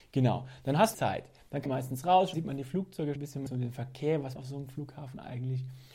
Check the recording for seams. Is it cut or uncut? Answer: cut